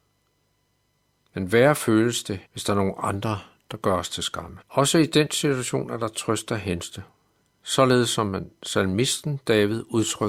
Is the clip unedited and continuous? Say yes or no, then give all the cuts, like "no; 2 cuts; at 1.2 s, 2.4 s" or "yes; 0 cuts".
no; 2 cuts; at 2.4 s, 4.6 s